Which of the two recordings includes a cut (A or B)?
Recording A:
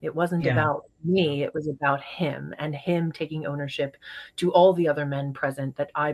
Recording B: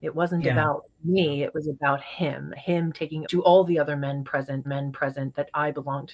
B